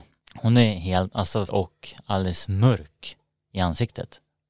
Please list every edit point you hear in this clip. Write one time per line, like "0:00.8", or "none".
0:01.5